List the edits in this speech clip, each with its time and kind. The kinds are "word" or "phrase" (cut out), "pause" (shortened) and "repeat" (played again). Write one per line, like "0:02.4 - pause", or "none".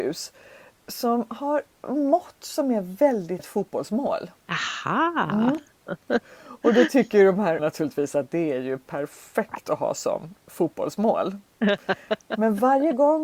0:01.7 - pause
0:03.4 - word
0:04.4 - pause
0:07.6 - word